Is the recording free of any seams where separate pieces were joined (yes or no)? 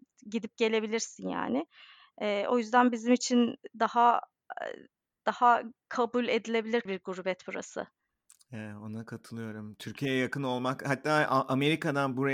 no